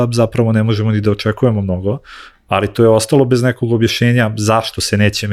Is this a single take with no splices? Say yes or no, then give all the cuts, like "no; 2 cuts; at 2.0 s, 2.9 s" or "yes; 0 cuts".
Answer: yes; 0 cuts